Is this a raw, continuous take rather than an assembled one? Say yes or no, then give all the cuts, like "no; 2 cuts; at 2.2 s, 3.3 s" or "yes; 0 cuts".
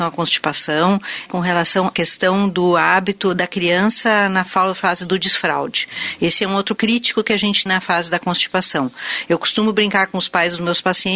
no; 4 cuts; at 1.3 s, 1.9 s, 6.8 s, 7.7 s